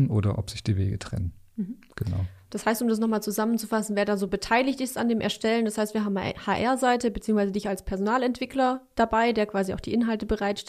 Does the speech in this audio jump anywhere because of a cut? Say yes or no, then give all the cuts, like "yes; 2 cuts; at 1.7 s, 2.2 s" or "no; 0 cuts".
no; 0 cuts